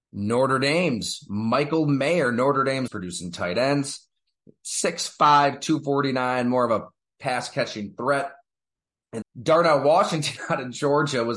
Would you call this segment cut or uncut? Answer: cut